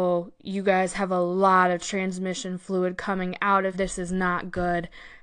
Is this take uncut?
no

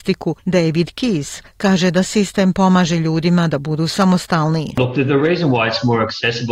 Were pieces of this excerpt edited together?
no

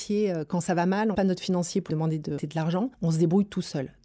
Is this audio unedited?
no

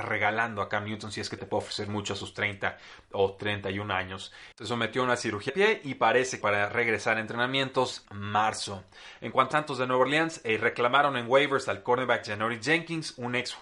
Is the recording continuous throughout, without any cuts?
no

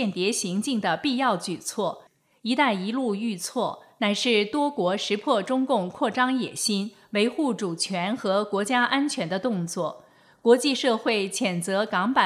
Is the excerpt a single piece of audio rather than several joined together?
yes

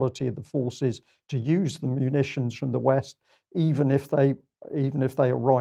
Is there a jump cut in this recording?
no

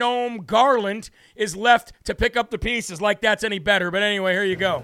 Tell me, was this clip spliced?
no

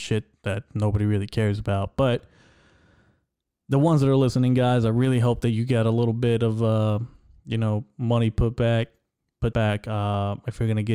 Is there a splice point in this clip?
yes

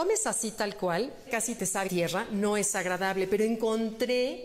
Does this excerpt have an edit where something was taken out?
yes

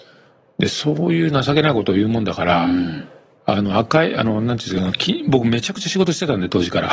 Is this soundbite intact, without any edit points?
yes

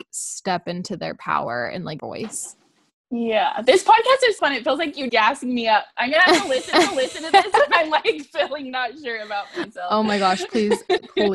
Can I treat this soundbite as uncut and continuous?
no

